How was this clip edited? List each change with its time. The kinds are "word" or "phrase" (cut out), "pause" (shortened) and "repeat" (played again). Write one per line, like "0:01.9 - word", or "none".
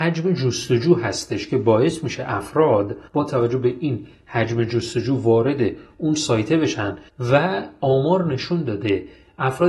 0:03.1 - pause
0:07.1 - pause